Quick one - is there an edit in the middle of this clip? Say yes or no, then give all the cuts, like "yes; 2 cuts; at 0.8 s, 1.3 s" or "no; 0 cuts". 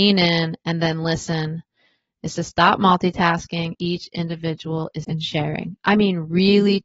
yes; 2 cuts; at 3.7 s, 5.0 s